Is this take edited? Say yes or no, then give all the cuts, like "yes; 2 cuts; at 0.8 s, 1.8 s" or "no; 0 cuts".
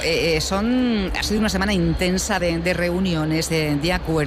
no; 0 cuts